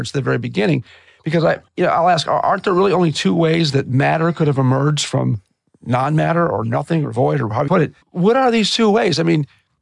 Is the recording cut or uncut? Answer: cut